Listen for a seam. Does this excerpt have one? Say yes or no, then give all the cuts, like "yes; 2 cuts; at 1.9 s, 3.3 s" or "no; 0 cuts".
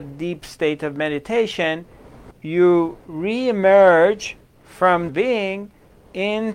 yes; 3 cuts; at 2.3 s, 3.0 s, 5.1 s